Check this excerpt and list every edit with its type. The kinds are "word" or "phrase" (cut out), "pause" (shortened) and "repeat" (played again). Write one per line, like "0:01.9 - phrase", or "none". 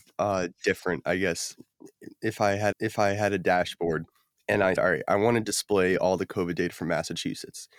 0:02.7 - repeat
0:04.8 - word